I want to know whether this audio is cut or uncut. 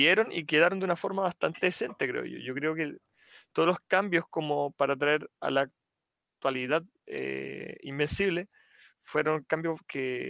uncut